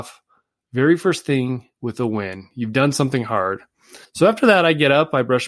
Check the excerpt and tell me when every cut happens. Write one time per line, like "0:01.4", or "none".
0:01.7
0:04.0

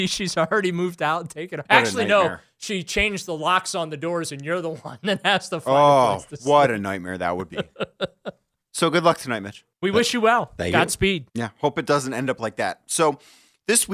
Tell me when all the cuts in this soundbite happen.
0:01.7
0:09.7
0:11.3

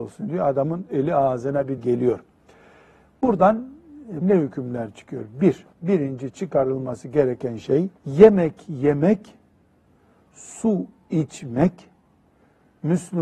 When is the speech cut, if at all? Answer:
0:01.8
0:04.2
0:05.7
0:08.0

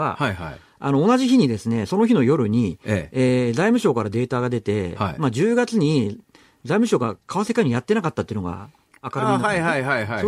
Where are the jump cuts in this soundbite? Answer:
none

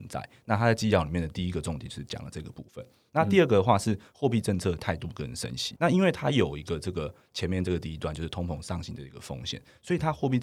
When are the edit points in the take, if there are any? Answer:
0:05.8

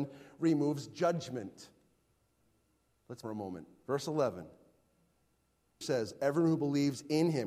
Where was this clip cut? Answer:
0:03.2
0:05.8

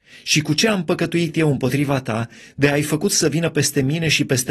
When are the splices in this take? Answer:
none

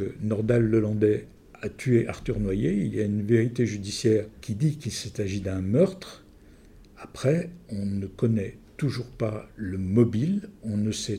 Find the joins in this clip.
none

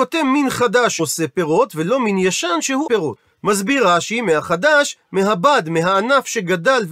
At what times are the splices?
0:01.0
0:02.9

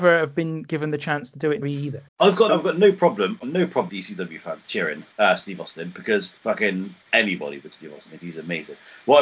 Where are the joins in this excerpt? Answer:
0:01.6
0:02.1
0:02.5
0:03.4
0:03.9
0:05.1
0:06.4
0:07.7
0:08.2

